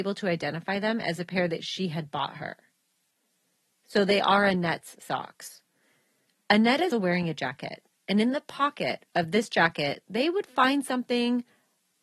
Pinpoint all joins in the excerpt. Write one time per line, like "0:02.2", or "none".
0:06.9